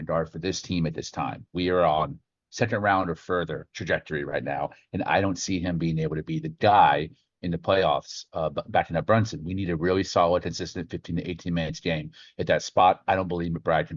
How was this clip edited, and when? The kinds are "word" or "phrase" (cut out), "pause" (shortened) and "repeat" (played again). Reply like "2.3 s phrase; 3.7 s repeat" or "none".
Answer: none